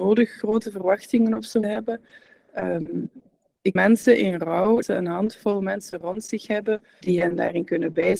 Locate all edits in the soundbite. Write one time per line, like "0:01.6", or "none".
0:01.6
0:03.8
0:04.8
0:07.0